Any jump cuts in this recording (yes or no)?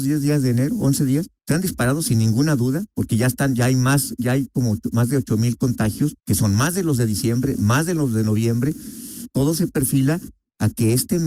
yes